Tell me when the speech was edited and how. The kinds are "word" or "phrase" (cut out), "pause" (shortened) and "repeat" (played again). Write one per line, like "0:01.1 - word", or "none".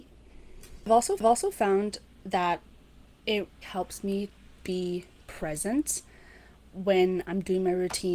0:01.2 - repeat
0:03.6 - word
0:04.6 - word